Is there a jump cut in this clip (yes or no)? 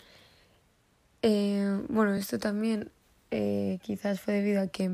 no